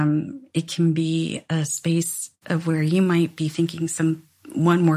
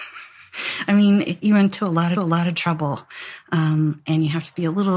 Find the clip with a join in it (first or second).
second